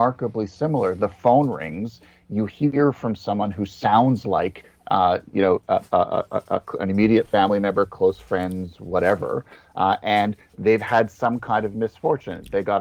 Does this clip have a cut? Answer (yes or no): no